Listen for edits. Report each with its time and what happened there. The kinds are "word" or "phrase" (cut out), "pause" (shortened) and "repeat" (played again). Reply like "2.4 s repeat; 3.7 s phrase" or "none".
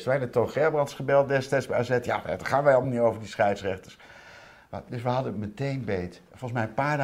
none